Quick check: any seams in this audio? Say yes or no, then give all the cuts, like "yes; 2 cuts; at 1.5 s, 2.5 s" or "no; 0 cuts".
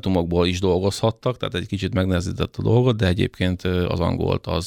no; 0 cuts